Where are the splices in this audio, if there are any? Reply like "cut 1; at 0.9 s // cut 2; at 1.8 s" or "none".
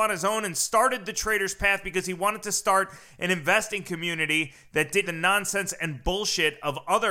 cut 1; at 5.0 s